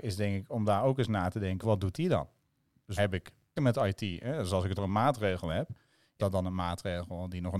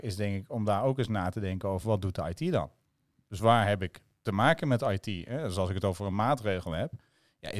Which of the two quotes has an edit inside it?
first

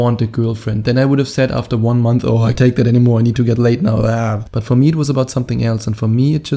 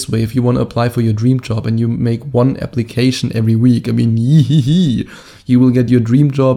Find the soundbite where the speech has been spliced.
first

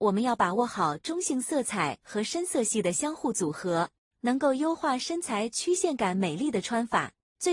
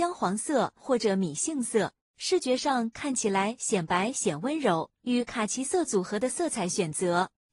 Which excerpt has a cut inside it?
second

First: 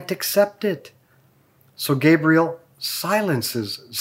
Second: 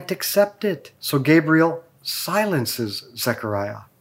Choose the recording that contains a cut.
second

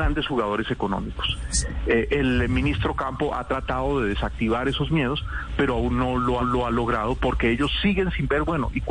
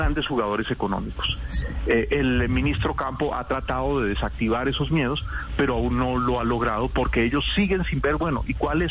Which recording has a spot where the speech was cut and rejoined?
first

